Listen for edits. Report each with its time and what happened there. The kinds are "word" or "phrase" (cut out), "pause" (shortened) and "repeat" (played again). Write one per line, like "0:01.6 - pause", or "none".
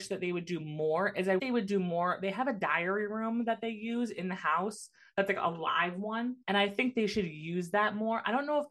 0:01.4 - phrase
0:06.4 - pause